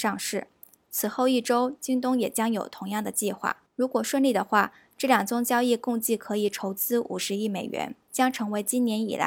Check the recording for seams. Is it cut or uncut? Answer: cut